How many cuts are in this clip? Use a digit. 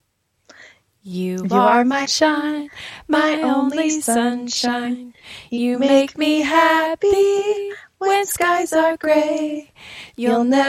1